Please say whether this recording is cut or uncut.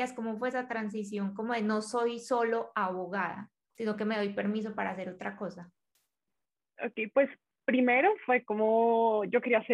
uncut